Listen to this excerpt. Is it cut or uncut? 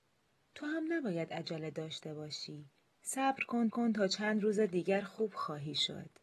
cut